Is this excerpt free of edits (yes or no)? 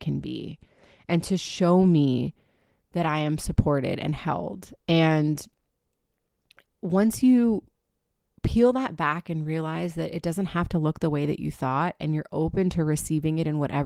yes